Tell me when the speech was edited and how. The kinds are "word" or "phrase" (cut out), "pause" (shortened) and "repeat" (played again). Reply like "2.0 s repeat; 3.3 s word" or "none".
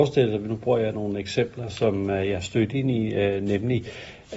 none